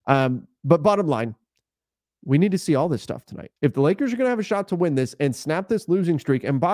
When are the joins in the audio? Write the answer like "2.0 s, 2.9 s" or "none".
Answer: 3.6 s